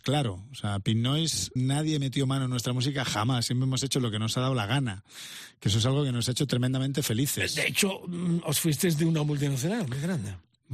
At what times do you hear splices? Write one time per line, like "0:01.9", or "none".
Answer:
0:01.6